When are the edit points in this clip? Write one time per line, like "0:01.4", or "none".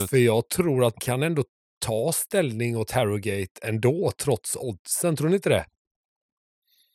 0:00.9